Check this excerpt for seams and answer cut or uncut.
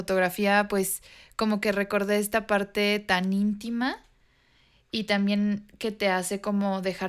uncut